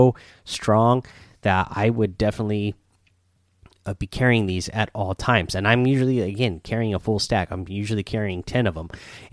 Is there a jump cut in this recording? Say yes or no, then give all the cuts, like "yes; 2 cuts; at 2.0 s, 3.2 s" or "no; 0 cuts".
no; 0 cuts